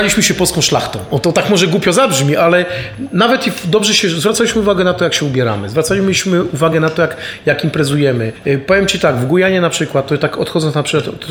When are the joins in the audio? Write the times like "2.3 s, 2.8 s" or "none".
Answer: none